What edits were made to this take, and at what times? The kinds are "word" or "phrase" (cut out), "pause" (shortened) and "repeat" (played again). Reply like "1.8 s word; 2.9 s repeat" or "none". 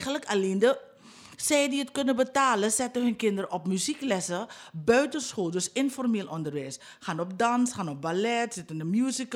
none